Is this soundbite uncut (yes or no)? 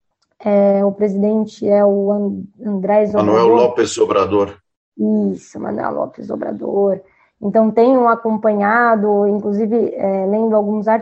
yes